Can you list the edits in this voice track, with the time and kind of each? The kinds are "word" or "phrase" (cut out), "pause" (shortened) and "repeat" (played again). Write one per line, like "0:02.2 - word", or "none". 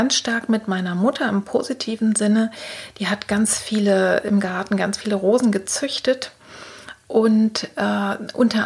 none